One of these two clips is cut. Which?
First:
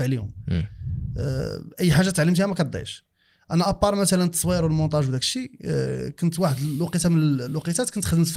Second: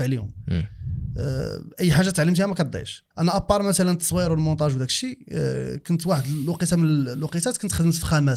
second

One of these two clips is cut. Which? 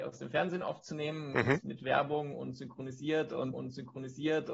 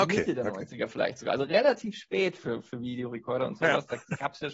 first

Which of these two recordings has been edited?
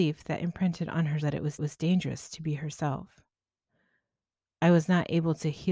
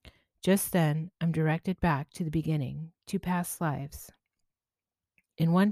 first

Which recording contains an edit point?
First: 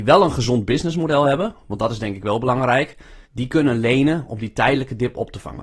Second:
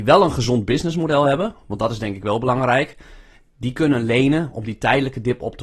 first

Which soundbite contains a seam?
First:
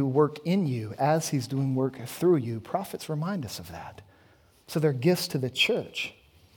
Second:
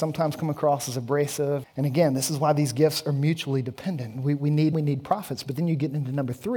second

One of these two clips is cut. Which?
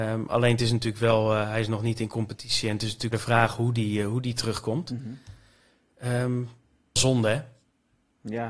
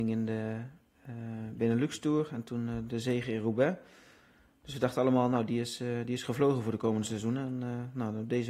first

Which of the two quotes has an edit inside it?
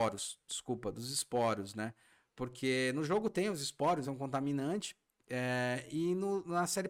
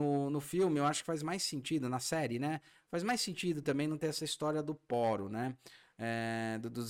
first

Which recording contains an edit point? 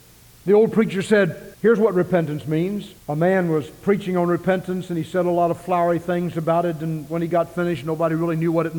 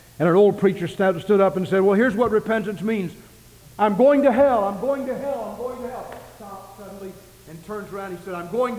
first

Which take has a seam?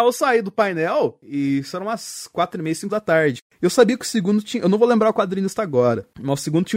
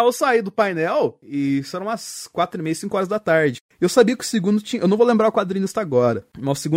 first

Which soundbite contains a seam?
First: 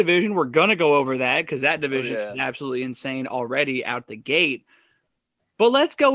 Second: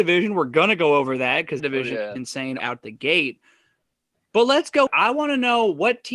second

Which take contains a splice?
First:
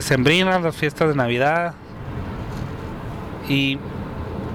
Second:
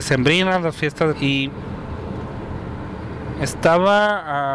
second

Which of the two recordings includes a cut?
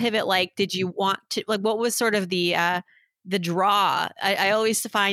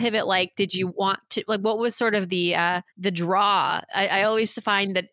second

